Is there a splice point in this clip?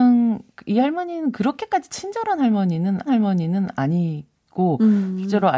yes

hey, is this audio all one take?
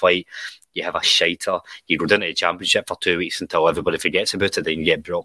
yes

